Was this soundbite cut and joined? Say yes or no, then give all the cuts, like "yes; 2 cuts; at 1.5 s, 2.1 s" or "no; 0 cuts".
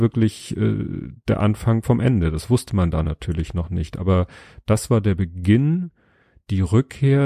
no; 0 cuts